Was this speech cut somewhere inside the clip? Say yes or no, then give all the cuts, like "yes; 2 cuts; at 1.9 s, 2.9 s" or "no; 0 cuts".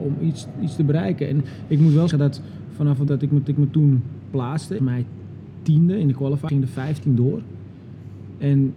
yes; 5 cuts; at 2.1 s, 3.1 s, 3.5 s, 4.8 s, 6.5 s